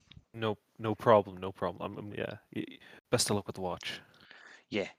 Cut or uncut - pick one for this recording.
cut